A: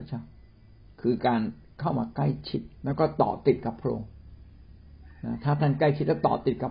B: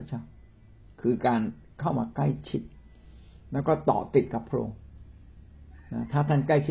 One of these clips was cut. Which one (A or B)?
A